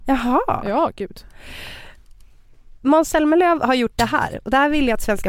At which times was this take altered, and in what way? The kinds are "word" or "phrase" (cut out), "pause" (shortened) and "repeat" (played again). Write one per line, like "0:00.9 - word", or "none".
none